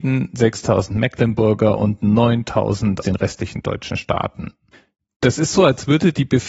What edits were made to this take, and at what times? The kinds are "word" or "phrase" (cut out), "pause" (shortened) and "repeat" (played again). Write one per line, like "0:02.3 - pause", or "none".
0:03.0 - word